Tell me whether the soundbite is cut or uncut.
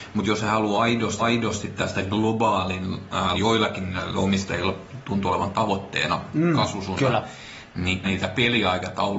cut